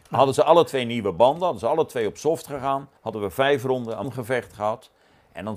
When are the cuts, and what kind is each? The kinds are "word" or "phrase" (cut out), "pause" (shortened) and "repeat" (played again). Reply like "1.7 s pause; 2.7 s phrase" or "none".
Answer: 3.0 s pause; 4.0 s word